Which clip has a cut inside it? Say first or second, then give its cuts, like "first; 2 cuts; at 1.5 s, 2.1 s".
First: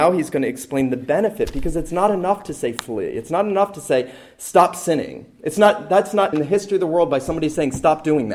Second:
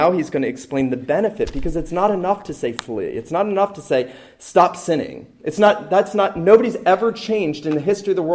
first; 1 cut; at 6.3 s